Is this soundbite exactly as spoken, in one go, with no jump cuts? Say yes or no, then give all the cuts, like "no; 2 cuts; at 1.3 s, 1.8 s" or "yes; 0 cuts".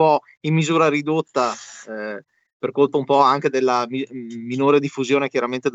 yes; 0 cuts